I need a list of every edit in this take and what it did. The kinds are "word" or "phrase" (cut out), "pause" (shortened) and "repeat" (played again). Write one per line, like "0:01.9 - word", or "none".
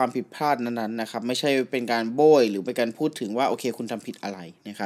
none